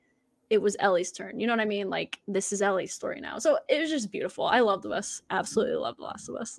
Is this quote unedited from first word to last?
no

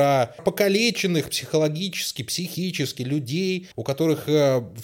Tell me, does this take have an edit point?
yes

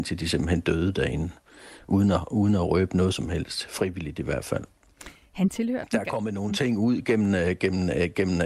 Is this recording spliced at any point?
no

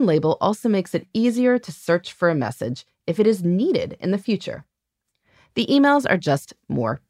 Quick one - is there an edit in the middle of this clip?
no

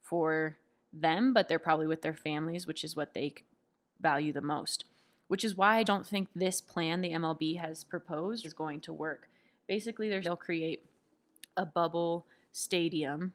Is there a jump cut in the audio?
yes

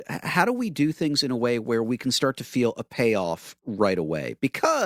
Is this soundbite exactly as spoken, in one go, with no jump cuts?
yes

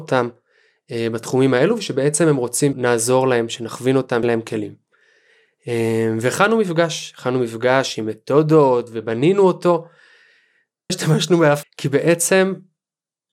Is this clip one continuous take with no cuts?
no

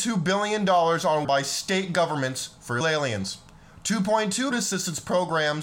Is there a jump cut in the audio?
yes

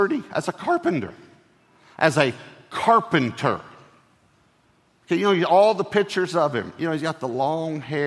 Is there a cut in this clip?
no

